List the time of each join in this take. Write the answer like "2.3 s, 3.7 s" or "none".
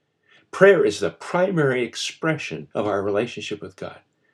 2.7 s